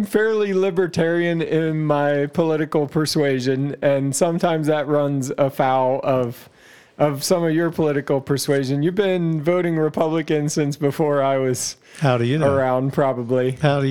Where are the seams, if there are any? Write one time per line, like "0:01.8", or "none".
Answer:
none